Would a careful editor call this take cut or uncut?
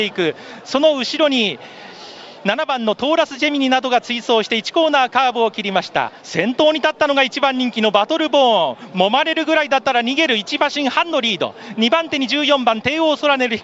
cut